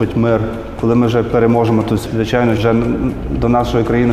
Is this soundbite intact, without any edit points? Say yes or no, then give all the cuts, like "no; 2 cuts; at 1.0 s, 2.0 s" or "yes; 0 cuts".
no; 2 cuts; at 2.1 s, 2.6 s